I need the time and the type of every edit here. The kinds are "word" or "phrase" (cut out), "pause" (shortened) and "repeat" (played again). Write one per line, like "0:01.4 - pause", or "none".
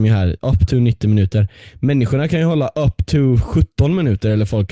none